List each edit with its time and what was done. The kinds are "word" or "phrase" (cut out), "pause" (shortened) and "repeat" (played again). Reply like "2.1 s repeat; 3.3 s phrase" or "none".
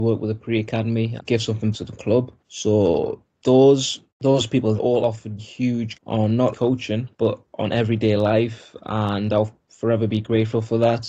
1.2 s word; 1.7 s word; 2.4 s pause; 4.1 s pause; 4.8 s word; 5.4 s word; 5.9 s phrase; 6.5 s word; 7.1 s pause